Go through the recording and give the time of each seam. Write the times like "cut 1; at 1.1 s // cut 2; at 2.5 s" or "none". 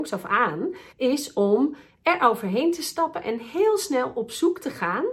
cut 1; at 0.9 s